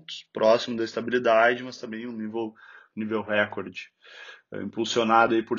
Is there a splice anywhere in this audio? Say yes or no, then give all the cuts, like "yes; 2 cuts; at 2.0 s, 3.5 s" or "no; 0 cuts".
no; 0 cuts